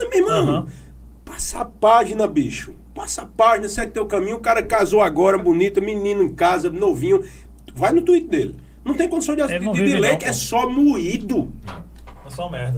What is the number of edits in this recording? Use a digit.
1